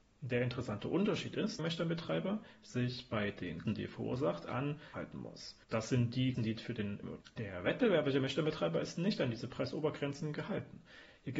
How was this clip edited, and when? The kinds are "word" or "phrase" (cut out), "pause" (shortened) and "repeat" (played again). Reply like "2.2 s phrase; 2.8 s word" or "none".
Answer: 1.6 s phrase; 3.7 s word; 4.9 s phrase; 5.6 s pause; 6.3 s word; 7.0 s phrase